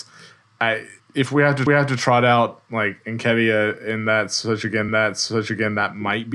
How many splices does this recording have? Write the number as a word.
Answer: three